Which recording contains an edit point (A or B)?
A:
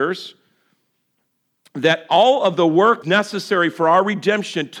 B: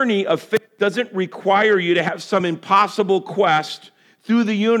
A